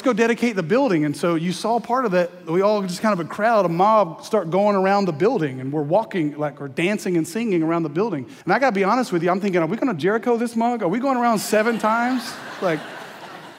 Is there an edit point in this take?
yes; 1 cut; at 8.4 s

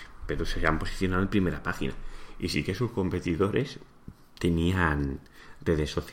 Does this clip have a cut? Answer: no; 0 cuts

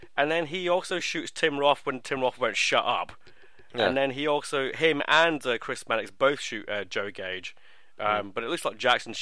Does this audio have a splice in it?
no; 0 cuts

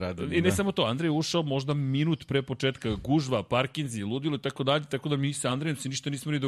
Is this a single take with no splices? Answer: yes; 0 cuts

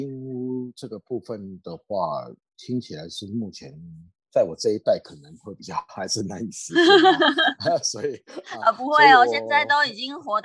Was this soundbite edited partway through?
no; 0 cuts

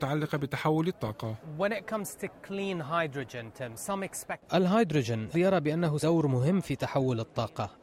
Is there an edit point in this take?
yes; 3 cuts; at 1.4 s, 5.3 s, 6.0 s

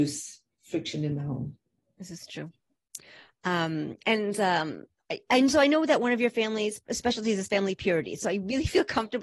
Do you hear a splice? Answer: no; 0 cuts

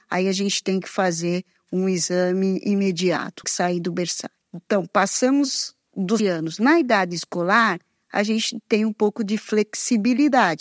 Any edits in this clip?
yes; 3 cuts; at 3.4 s, 4.4 s, 6.2 s

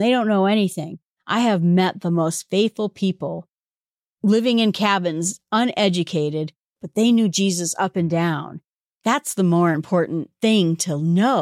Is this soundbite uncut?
yes; 0 cuts

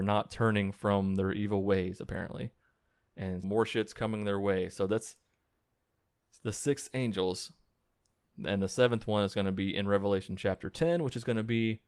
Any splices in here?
yes; 1 cut; at 3.4 s

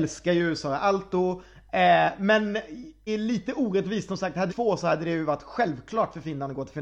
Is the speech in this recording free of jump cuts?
no; 2 cuts; at 3.1 s, 4.5 s

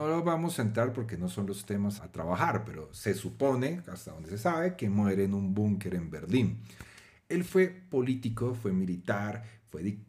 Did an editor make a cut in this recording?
yes; 1 cut; at 2.0 s

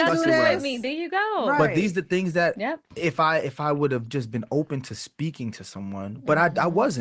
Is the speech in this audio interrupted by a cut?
no; 0 cuts

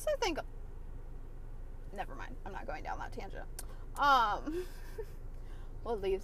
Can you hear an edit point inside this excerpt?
no; 0 cuts

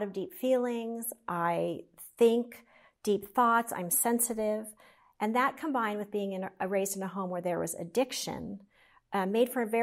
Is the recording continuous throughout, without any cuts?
yes; 0 cuts

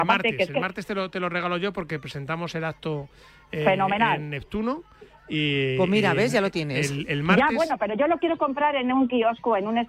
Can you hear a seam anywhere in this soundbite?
no; 0 cuts

